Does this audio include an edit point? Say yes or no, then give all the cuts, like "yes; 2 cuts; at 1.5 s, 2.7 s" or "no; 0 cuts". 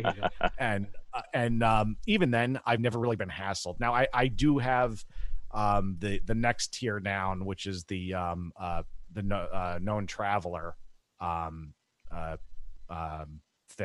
no; 0 cuts